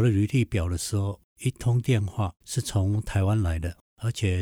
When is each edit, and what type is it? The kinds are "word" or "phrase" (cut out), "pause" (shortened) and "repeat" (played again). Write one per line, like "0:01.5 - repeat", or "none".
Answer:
0:02.4 - pause